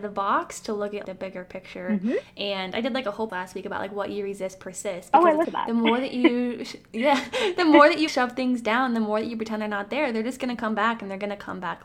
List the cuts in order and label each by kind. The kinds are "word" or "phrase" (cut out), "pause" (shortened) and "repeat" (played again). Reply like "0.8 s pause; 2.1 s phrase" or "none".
1.0 s word; 3.3 s word; 5.4 s word; 8.1 s word